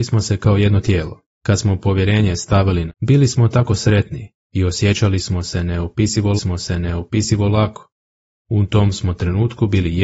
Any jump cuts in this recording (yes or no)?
yes